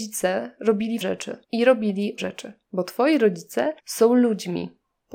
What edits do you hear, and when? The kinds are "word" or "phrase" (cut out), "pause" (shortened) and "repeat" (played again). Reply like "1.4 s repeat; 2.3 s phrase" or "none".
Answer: 1.0 s word; 1.4 s pause; 2.2 s word; 2.6 s pause; 3.8 s pause